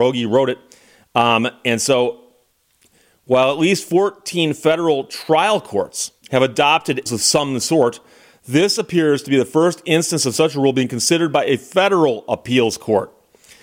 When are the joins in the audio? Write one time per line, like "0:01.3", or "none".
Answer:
0:07.1